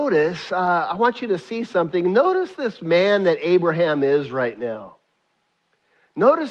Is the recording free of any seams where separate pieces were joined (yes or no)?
yes